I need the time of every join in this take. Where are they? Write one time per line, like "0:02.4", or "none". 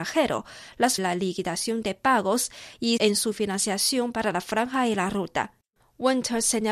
0:01.0
0:03.0